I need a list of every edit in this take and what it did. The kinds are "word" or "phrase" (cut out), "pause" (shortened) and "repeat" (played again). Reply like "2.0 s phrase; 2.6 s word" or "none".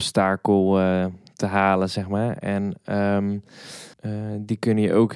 3.9 s pause

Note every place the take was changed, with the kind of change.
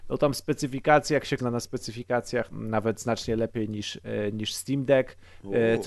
1.4 s word; 2.5 s phrase

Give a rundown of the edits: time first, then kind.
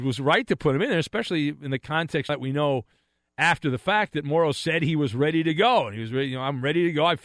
2.3 s word

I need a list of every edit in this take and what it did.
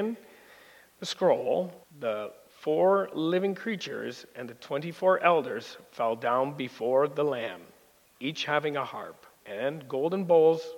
1.8 s pause; 9.3 s pause

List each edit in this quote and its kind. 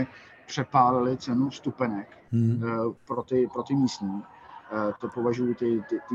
3.0 s pause

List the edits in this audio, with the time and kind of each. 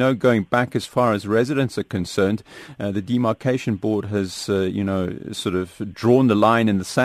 none

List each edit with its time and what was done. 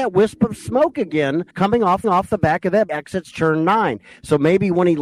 1.5 s pause; 2.0 s repeat; 2.9 s phrase

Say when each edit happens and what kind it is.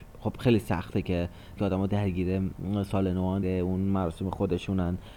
1.6 s word; 3.4 s word

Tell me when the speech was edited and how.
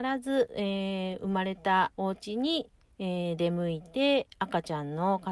1.9 s pause

